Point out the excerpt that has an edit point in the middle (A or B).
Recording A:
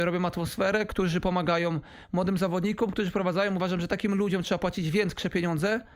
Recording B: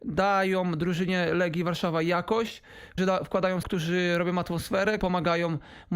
B